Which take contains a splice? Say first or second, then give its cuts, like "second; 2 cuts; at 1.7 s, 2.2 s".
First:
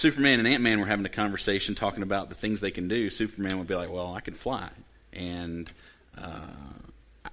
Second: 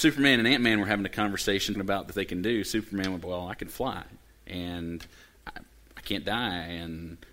second; 4 cuts; at 1.7 s, 2.1 s, 3.2 s, 5.4 s